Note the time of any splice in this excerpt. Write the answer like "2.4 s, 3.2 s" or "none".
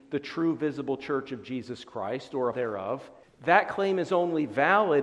2.5 s, 3.2 s